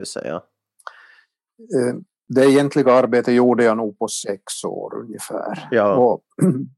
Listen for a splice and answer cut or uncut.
uncut